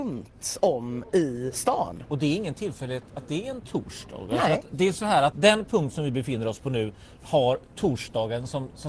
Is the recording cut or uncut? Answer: uncut